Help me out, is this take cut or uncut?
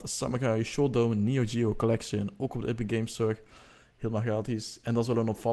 uncut